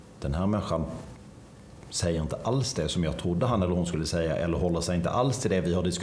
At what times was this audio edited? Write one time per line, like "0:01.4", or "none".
none